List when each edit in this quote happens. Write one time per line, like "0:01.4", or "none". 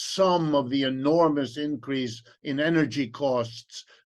none